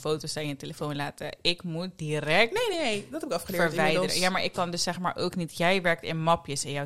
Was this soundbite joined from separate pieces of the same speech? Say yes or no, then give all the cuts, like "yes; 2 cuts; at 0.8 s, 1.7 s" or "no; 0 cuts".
no; 0 cuts